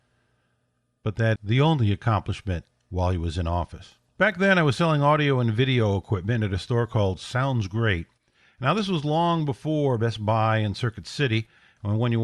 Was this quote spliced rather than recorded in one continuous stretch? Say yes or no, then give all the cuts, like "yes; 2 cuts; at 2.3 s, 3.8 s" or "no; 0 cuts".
yes; 3 cuts; at 1.4 s, 2.7 s, 4.1 s